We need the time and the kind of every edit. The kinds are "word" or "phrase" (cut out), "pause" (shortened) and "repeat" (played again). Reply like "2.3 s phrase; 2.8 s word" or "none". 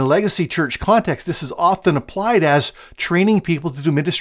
none